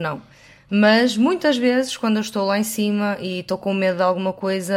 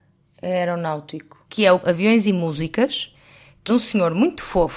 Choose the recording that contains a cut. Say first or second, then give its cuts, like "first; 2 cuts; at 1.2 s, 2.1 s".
second; 2 cuts; at 1.8 s, 3.7 s